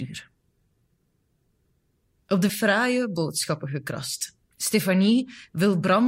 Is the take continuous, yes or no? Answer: no